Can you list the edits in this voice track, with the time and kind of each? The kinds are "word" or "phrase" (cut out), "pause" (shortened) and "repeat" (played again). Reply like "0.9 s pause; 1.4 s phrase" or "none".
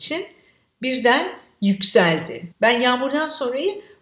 2.5 s pause